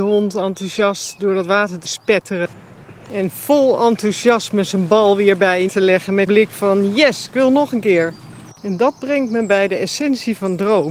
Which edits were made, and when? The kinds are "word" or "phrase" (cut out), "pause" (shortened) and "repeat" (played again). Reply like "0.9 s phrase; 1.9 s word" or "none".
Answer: 1.8 s word; 5.7 s word; 6.3 s word; 8.6 s pause